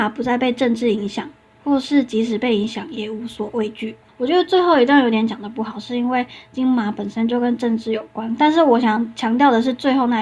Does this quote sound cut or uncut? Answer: uncut